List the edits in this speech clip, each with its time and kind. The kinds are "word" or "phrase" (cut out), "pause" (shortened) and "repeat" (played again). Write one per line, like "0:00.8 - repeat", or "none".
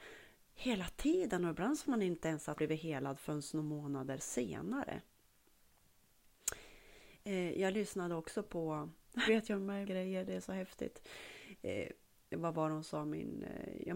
0:01.8 - word
0:02.6 - word
0:09.3 - word
0:09.9 - word